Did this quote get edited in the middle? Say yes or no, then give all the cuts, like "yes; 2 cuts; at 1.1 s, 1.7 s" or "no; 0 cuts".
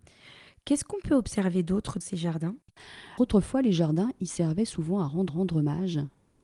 yes; 3 cuts; at 2.0 s, 3.2 s, 5.3 s